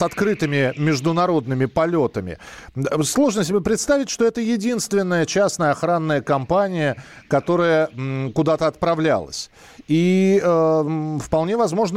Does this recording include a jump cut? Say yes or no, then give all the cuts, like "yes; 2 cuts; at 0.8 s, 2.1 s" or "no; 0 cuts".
no; 0 cuts